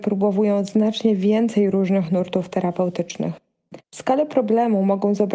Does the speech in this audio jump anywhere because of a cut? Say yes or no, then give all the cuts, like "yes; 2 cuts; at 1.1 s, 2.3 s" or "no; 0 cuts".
yes; 1 cut; at 3.8 s